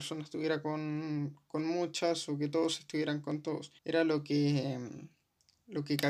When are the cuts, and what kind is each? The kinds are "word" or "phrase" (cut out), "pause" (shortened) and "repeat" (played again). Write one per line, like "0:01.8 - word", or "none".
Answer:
0:03.8 - pause

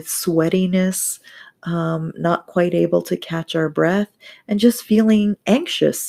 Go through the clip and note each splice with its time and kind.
none

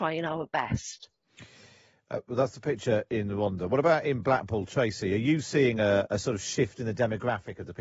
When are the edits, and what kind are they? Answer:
none

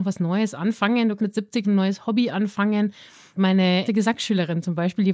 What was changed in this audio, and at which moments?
0:01.2 - word
0:01.6 - word
0:03.9 - word

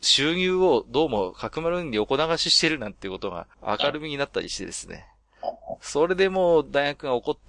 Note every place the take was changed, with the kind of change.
0:03.5 - pause

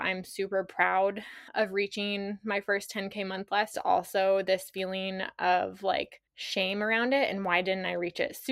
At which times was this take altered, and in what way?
0:01.5 - pause
0:03.7 - phrase
0:06.3 - pause

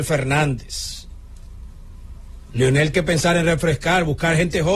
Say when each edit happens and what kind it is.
0:02.9 - word

